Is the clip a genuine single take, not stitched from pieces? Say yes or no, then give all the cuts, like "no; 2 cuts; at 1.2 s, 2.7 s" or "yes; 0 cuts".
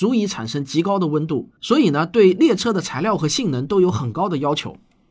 no; 1 cut; at 1.5 s